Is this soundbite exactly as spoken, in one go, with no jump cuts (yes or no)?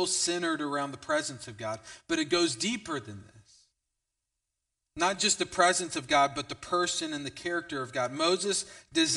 yes